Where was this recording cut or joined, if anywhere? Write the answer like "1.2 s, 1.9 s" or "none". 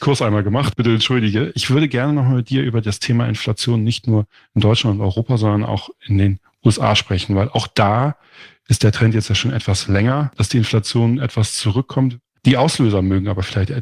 none